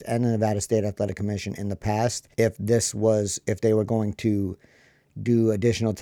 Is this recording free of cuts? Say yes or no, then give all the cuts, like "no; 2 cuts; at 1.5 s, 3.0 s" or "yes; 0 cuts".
no; 1 cut; at 2.3 s